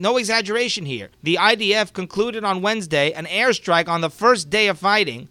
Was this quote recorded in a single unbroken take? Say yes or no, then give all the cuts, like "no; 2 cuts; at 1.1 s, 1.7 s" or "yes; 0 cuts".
no; 1 cut; at 1.1 s